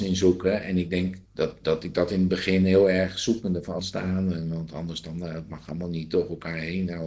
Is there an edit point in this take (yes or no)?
yes